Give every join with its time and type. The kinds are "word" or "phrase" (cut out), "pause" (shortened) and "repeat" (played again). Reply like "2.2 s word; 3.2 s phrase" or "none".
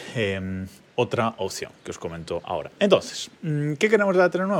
none